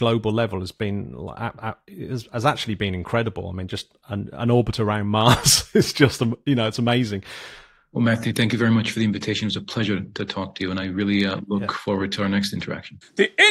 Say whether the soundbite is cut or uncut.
uncut